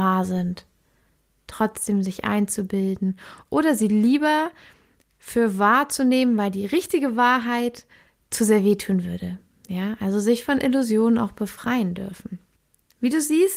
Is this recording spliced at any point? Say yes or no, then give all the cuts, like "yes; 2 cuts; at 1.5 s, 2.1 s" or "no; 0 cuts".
no; 0 cuts